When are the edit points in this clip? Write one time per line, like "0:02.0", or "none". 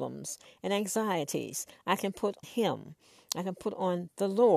0:02.4